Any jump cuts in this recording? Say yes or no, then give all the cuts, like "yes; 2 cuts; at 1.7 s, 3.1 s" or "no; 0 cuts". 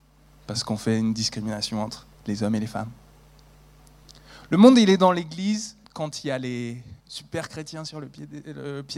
yes; 3 cuts; at 2.1 s, 5.8 s, 7.0 s